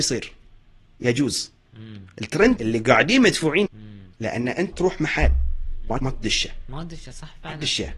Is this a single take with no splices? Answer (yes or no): no